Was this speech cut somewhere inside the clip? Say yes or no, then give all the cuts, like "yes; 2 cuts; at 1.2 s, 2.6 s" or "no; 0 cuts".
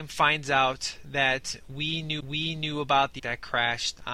yes; 2 cuts; at 2.2 s, 3.2 s